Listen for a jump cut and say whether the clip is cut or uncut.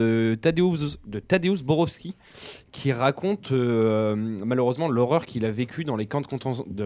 uncut